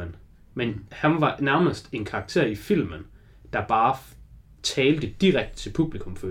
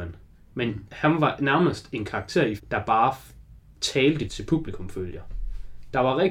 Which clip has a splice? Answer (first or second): second